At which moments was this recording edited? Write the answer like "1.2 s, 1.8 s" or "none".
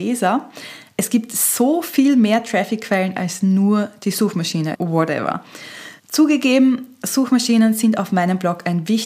4.7 s, 6.0 s